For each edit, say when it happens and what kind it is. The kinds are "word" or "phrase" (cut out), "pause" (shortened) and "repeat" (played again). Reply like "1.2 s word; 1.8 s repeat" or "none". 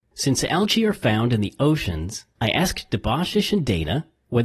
2.3 s pause